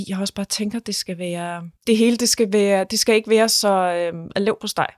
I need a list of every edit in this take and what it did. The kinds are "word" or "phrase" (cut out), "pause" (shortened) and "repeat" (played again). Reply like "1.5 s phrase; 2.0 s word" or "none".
1.8 s pause